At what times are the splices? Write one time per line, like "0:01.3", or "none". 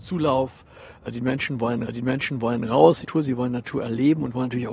0:01.9
0:03.0